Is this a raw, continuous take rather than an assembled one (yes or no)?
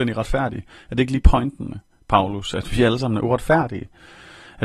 yes